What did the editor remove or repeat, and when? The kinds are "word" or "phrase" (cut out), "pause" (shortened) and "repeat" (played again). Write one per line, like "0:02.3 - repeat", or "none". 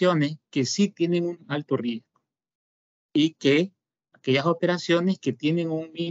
none

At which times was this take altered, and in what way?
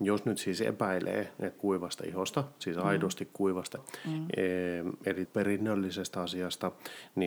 0:01.6 - word
0:03.8 - word
0:05.2 - word

